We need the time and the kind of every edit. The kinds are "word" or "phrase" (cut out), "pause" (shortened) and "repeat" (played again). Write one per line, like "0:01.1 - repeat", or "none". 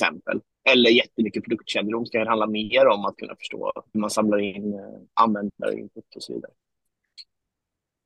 0:03.9 - word